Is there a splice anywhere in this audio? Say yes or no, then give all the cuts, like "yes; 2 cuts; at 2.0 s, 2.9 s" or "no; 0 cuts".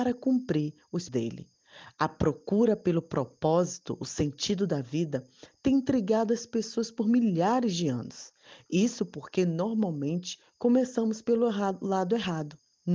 yes; 1 cut; at 1.1 s